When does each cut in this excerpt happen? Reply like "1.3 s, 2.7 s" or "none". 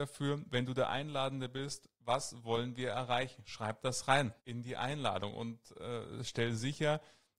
4.4 s